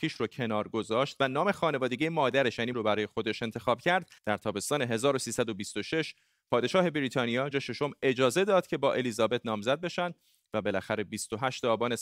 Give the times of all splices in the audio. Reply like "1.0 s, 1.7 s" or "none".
2.7 s, 4.2 s, 7.5 s